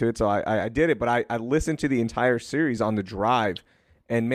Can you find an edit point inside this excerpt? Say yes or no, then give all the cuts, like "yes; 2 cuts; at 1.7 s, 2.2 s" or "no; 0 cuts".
no; 0 cuts